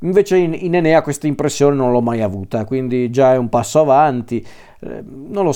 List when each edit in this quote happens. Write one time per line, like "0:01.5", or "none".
none